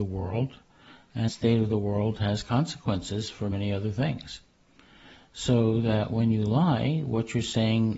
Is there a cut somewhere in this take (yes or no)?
yes